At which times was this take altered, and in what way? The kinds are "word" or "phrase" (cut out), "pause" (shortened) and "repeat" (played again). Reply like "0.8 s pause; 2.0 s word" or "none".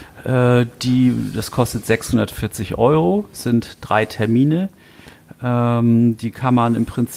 none

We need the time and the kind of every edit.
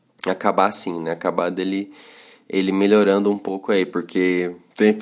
none

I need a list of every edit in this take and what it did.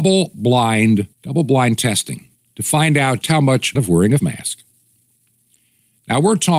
1.1 s pause; 2.3 s pause; 3.2 s word; 3.7 s phrase; 4.2 s word

